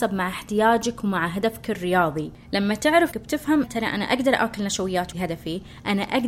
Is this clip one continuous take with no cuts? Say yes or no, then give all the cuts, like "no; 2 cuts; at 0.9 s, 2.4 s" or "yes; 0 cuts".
no; 3 cuts; at 3.1 s, 3.6 s, 5.1 s